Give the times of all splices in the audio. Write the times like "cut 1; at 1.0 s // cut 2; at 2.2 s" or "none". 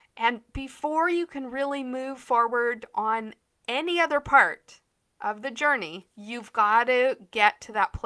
cut 1; at 6.1 s